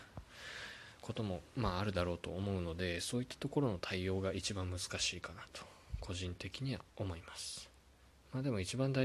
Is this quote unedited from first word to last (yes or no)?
yes